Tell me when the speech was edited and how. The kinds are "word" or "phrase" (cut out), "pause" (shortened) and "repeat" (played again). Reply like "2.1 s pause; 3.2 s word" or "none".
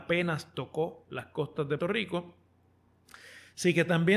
1.8 s word